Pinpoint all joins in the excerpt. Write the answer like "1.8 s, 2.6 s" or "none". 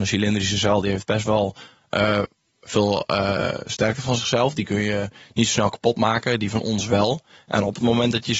none

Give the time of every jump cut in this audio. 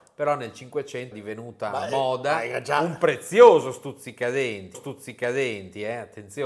1.1 s, 4.7 s

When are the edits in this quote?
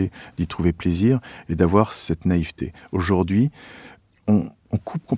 none

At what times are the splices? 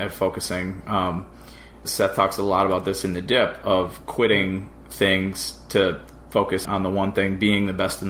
1.8 s, 6.6 s

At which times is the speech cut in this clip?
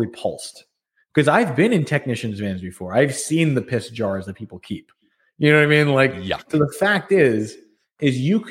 none

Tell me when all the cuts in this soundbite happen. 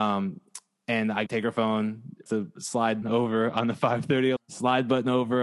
1.3 s, 2.3 s, 3.0 s, 4.4 s

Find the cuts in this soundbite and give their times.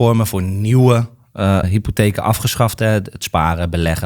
1.6 s

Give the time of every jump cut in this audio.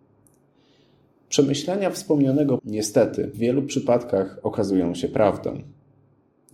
2.6 s, 3.3 s

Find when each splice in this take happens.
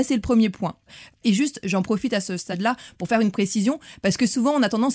none

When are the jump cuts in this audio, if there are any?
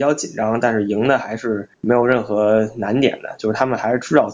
1.7 s

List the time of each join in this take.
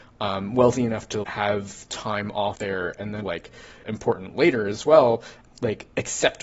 1.2 s, 2.5 s, 3.2 s, 3.8 s

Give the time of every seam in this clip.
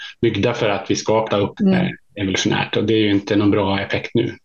1.3 s, 1.6 s

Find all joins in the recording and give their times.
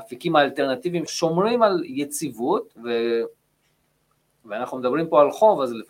1.1 s, 2.8 s

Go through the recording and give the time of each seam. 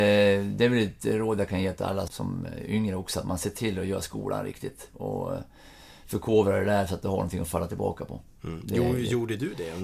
2.1 s

